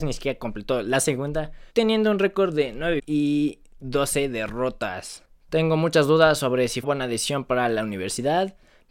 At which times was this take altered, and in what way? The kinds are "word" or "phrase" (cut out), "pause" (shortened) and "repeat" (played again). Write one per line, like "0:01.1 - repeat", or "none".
0:01.7 - pause
0:03.0 - word
0:06.8 - phrase